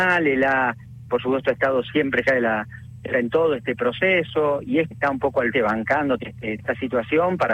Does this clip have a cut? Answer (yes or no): yes